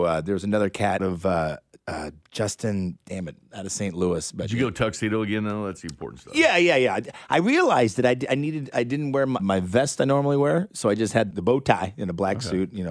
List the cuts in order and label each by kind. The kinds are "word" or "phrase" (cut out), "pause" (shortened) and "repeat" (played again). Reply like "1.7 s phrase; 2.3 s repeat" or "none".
1.0 s word; 9.4 s word; 11.3 s word